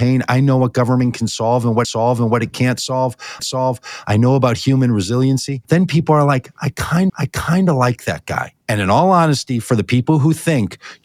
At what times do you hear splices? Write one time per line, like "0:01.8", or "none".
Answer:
0:01.8
0:03.4
0:05.6
0:07.1
0:08.6